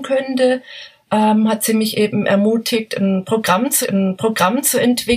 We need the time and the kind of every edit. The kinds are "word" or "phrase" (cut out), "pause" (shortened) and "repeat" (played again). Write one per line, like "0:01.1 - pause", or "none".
0:03.8 - repeat

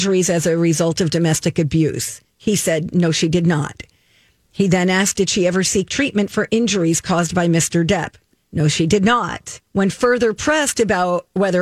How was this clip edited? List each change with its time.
0:09.7 - pause

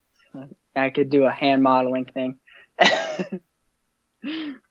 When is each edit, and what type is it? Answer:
0:02.1 - word

